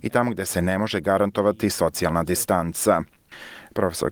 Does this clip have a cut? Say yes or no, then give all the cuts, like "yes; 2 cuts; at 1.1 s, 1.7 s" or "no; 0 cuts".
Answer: no; 0 cuts